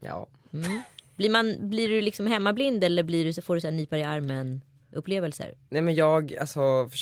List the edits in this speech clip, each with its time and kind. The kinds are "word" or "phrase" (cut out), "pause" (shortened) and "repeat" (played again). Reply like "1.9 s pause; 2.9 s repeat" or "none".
none